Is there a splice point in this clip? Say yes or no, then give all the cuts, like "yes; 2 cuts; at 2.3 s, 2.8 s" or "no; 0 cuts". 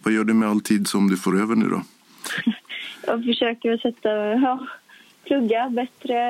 no; 0 cuts